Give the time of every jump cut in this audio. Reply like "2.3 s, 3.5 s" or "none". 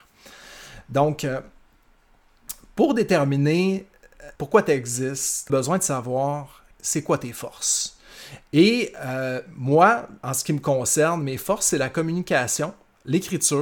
4.4 s, 5.5 s, 6.7 s, 10.2 s